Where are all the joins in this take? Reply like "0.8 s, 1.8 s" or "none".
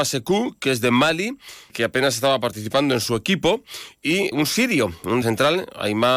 1.7 s, 4.3 s, 5.2 s